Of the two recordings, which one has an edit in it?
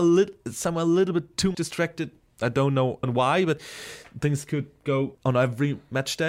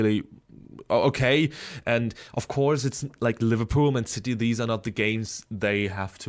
first; 3 cuts; at 1.5 s, 3.0 s, 5.1 s

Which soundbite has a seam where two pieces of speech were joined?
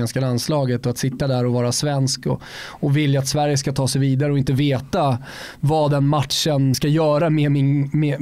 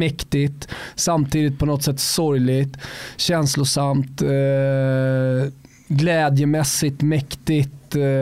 first; 1 cut; at 6.7 s

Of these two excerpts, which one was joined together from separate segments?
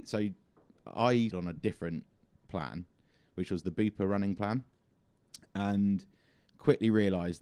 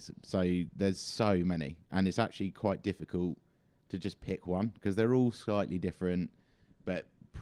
first; 1 cut; at 1.3 s

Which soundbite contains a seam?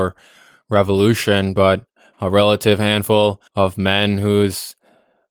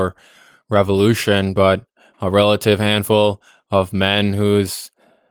first; 1 cut; at 3.5 s

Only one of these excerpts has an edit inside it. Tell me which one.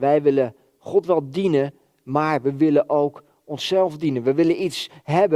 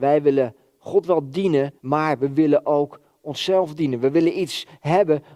second; 1 cut; at 1.8 s

